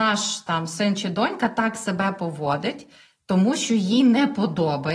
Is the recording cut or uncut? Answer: uncut